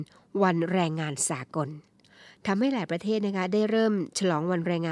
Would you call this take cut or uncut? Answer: uncut